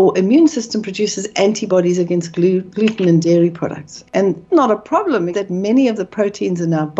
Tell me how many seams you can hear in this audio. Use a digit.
2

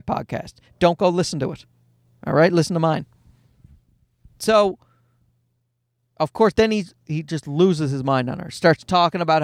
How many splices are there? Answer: 0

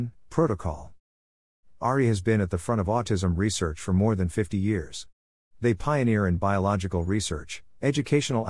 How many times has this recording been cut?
0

